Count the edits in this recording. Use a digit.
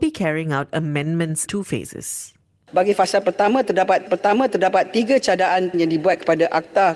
4